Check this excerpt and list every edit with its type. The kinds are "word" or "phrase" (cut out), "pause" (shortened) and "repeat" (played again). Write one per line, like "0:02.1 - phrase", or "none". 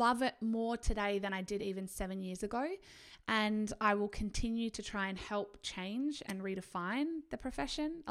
none